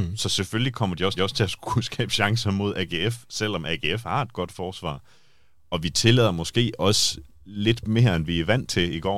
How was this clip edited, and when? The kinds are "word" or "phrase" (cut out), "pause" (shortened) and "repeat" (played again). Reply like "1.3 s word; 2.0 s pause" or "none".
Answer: 1.2 s repeat